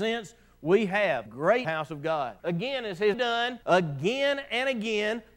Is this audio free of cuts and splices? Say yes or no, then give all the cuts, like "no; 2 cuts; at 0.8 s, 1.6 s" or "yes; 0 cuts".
no; 5 cuts; at 1.3 s, 1.6 s, 2.4 s, 3.1 s, 3.6 s